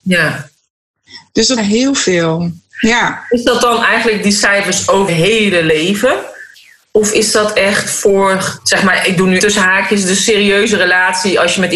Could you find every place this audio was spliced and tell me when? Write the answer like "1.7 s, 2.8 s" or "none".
1.6 s, 5.1 s, 8.6 s, 9.4 s